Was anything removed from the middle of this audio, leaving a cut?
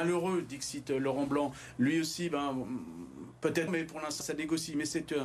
yes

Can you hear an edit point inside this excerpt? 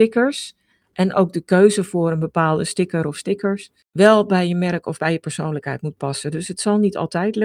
no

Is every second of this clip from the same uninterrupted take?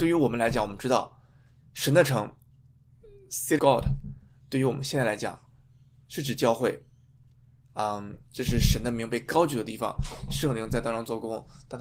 no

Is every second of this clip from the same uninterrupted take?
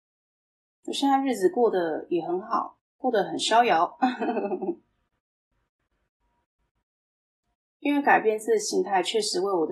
no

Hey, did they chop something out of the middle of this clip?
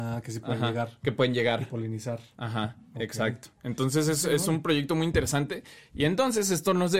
no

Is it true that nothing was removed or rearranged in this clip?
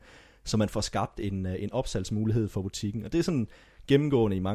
yes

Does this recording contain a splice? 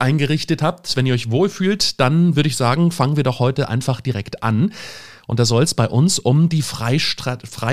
no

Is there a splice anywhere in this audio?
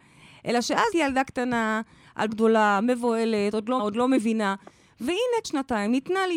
yes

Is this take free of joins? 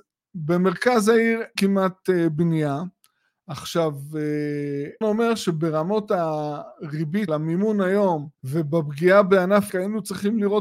no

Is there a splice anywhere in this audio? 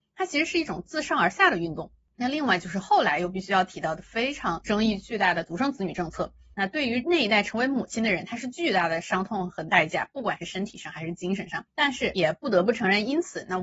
yes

